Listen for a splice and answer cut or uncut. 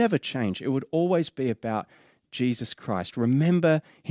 uncut